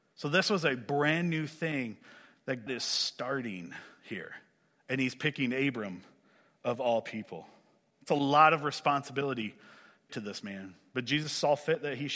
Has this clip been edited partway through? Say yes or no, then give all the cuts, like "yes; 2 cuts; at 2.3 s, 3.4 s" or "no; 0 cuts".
yes; 2 cuts; at 2.7 s, 10.1 s